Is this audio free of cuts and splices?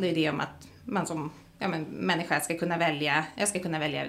yes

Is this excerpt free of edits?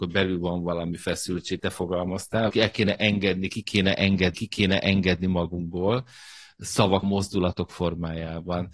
no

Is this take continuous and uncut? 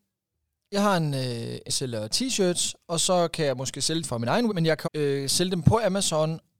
no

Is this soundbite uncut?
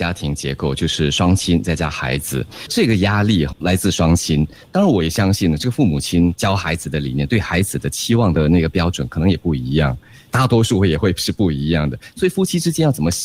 no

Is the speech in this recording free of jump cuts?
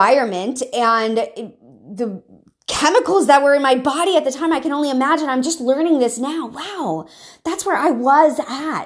yes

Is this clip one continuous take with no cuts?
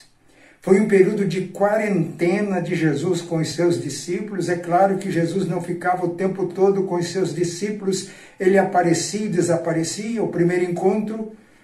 yes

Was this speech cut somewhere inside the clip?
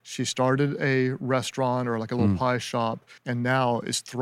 yes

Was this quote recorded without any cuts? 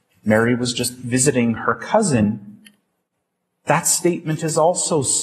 yes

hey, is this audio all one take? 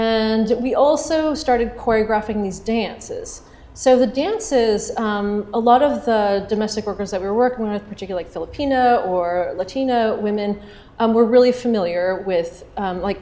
yes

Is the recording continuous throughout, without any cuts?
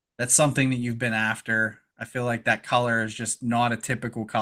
yes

